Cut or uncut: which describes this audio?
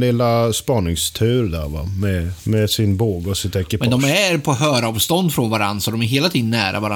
uncut